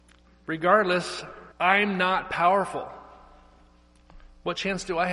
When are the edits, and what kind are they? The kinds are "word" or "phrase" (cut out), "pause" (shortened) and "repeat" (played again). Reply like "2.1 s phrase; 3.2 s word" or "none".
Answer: 1.5 s pause